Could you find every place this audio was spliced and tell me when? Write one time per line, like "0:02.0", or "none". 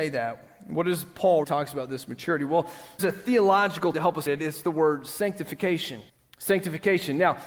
0:01.4
0:03.0
0:03.9
0:04.3
0:06.1